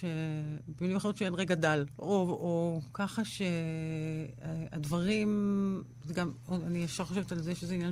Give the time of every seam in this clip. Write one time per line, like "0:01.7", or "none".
none